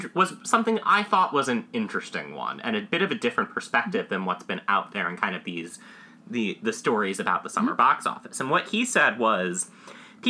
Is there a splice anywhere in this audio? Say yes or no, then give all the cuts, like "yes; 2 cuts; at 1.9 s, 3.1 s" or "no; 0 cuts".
no; 0 cuts